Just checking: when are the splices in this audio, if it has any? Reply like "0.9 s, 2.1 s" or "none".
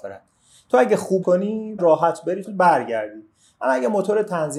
1.2 s, 1.8 s, 2.5 s

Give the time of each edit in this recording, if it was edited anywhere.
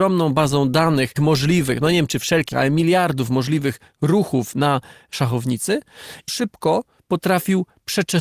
1.2 s, 2.5 s, 6.3 s

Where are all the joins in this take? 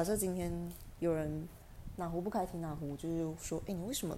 none

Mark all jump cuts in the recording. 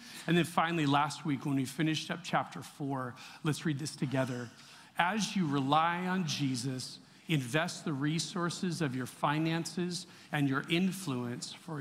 none

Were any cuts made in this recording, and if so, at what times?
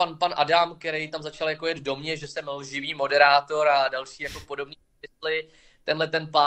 none

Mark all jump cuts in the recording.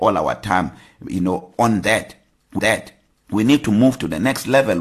2.6 s

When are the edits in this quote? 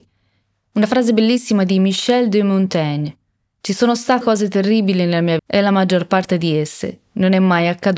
4.2 s, 5.4 s

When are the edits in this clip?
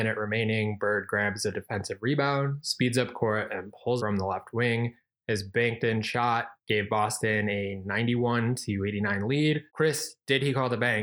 4.0 s, 6.6 s, 9.7 s

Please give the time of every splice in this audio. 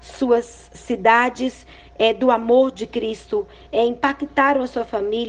none

